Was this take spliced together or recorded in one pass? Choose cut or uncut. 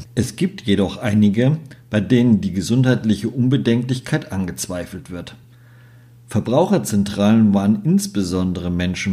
uncut